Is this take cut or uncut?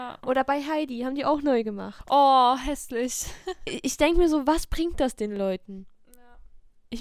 uncut